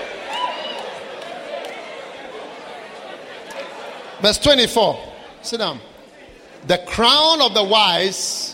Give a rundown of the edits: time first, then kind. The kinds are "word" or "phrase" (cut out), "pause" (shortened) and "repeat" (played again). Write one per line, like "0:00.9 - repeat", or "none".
none